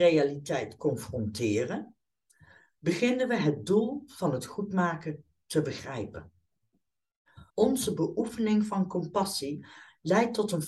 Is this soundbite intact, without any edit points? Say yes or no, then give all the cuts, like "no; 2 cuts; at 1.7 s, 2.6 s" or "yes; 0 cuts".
no; 1 cut; at 7.5 s